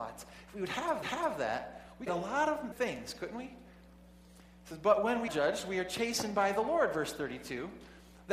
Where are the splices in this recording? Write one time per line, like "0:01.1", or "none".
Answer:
0:01.0
0:02.1
0:02.7
0:05.3